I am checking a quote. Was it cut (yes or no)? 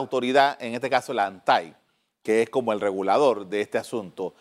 no